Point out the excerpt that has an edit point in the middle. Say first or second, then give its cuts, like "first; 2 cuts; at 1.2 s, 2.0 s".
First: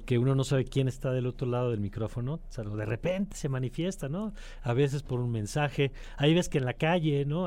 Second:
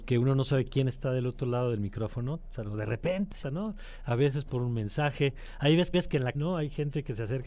second; 3 cuts; at 3.4 s, 5.9 s, 6.3 s